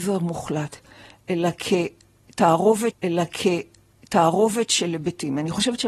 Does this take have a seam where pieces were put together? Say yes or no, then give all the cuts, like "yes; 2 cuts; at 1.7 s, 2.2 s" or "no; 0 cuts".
yes; 1 cut; at 2.9 s